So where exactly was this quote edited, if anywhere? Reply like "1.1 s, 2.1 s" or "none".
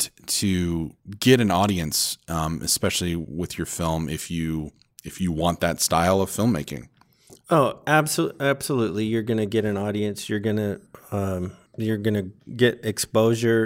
none

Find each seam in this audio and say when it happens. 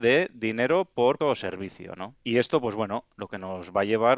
1.2 s, 2.2 s

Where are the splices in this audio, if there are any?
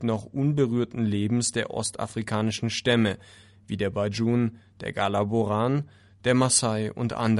none

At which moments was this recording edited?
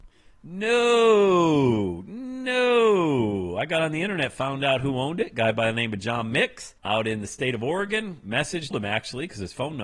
6.8 s, 8.7 s

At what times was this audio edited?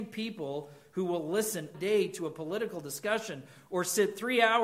1.7 s

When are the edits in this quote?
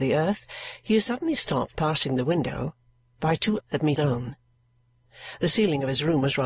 1.7 s, 3.6 s, 4.0 s

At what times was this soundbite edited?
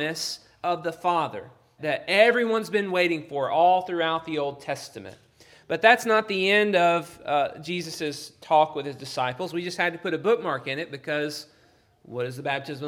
1.8 s

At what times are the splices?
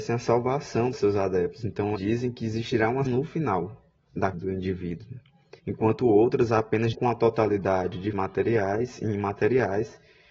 0.9 s, 2.0 s, 3.1 s, 4.3 s, 5.6 s, 6.9 s, 8.1 s

